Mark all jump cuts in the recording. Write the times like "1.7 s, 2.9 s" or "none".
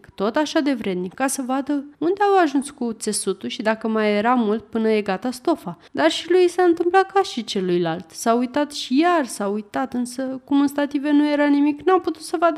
1.9 s, 5.9 s